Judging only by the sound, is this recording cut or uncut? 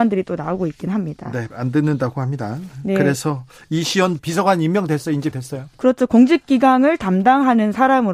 cut